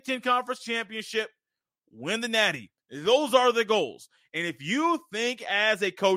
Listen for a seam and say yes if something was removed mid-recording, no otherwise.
no